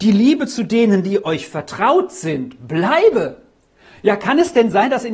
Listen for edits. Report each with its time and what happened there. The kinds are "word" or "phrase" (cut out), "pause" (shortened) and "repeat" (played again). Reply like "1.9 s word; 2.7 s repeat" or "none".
none